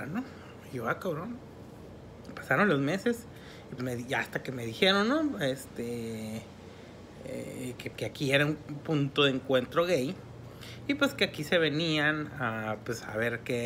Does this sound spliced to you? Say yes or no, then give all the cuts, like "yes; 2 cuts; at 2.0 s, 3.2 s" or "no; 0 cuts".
yes; 2 cuts; at 3.8 s, 7.9 s